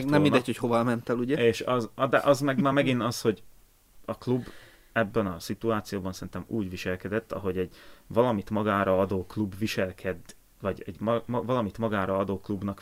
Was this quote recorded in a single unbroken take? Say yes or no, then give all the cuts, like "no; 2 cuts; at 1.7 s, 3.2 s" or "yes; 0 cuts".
yes; 0 cuts